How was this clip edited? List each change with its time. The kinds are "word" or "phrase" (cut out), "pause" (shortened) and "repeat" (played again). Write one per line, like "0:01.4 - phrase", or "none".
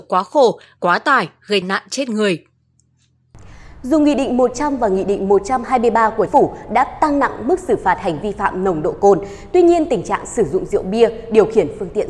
0:01.6 - word
0:06.3 - word
0:08.2 - word